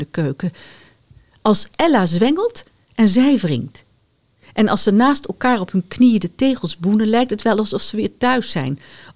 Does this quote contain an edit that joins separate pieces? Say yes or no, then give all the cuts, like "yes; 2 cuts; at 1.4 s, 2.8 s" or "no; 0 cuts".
no; 0 cuts